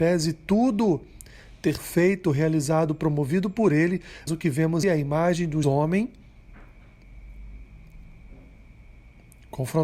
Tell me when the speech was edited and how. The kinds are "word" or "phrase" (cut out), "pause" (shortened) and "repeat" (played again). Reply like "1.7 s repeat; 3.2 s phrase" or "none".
1.8 s word; 4.3 s word; 4.8 s word; 5.6 s word